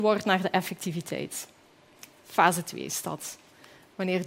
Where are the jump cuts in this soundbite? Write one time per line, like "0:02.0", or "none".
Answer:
none